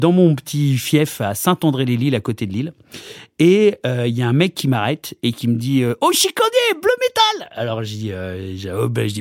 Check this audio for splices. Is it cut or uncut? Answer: uncut